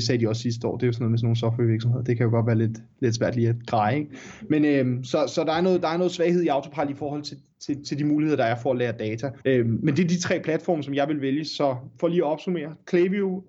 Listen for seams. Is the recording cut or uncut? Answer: cut